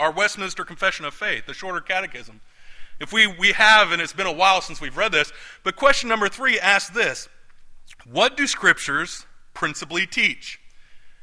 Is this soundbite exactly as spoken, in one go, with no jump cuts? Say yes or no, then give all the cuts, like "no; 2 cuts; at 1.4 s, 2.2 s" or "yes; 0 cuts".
yes; 0 cuts